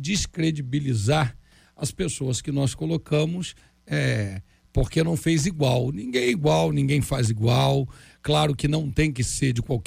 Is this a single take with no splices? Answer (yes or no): yes